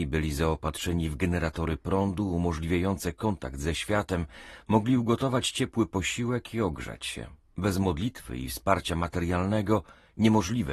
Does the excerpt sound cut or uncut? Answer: uncut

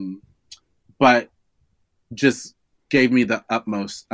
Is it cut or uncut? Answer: uncut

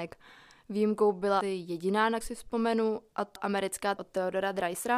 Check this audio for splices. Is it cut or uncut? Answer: cut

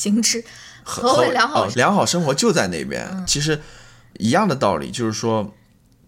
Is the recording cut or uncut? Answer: cut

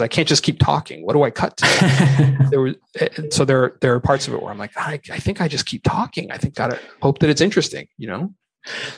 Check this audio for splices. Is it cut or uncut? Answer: cut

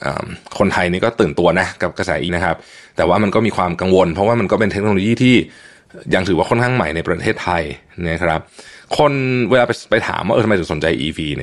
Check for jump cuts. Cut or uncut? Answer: cut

